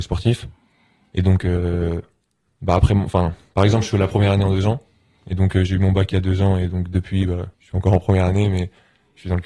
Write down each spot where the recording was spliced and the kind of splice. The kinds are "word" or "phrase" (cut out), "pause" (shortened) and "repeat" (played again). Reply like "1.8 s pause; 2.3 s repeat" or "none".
7.5 s pause